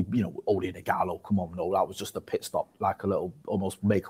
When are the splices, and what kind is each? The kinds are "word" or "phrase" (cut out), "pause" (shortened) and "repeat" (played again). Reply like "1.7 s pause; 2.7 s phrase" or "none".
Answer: none